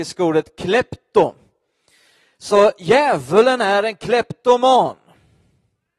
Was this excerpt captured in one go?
yes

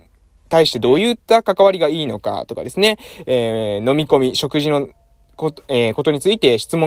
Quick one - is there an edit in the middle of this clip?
no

